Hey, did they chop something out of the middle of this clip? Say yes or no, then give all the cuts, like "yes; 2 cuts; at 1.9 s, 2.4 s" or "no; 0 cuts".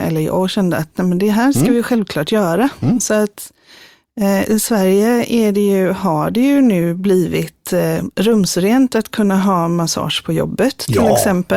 no; 0 cuts